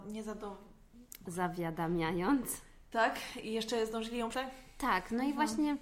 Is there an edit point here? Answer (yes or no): yes